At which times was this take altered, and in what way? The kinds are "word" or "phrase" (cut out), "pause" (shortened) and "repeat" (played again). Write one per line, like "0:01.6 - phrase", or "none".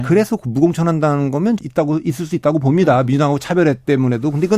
0:01.6 - word